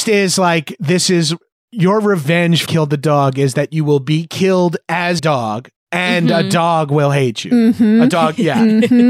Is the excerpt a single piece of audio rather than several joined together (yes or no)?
no